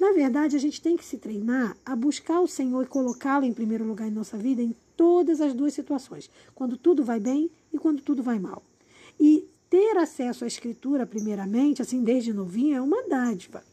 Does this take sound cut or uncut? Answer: uncut